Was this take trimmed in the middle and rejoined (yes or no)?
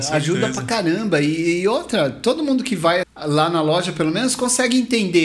yes